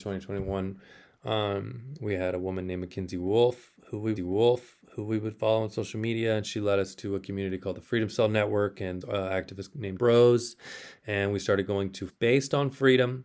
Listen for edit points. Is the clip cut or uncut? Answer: cut